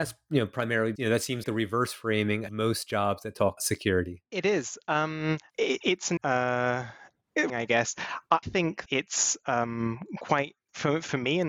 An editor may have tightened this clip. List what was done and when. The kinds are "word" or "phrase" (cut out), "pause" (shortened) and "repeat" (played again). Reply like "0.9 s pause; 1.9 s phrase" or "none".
1.0 s word; 1.4 s word; 2.5 s word; 3.6 s word; 5.5 s word; 6.2 s word; 7.5 s word; 8.4 s word; 8.9 s word